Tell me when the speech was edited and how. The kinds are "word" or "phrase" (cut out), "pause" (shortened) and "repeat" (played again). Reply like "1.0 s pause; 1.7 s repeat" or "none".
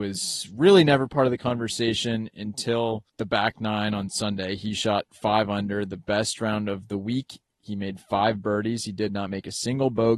3.1 s pause